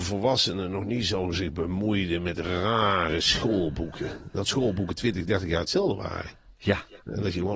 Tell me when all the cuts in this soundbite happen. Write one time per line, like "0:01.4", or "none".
none